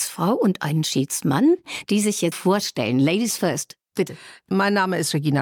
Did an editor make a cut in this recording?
yes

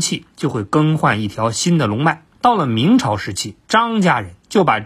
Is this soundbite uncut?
no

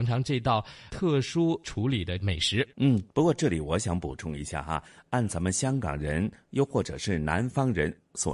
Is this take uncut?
yes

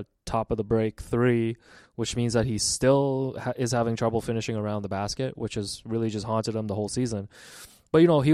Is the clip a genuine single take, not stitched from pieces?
yes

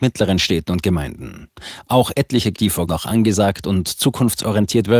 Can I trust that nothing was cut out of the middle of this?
no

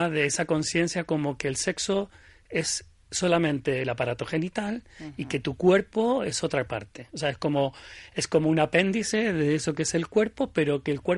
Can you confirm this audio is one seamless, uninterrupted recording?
yes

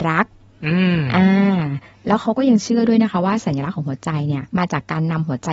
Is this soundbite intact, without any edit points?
no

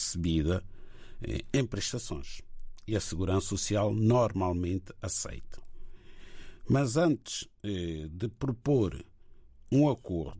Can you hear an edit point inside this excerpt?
no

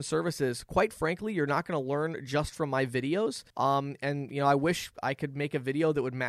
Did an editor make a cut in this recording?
yes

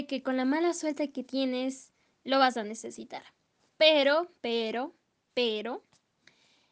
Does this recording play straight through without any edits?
yes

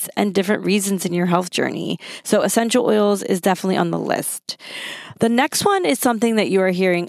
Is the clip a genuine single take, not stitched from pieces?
yes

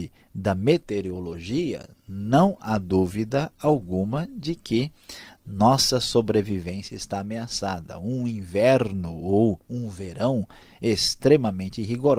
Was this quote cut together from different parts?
no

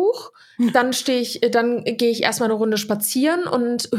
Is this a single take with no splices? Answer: yes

